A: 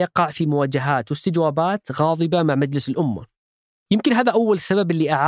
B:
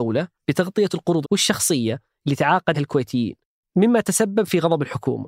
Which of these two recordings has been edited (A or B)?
B